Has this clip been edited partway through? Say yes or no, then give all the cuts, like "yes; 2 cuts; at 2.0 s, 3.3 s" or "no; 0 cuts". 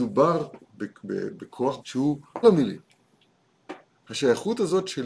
yes; 2 cuts; at 1.8 s, 2.4 s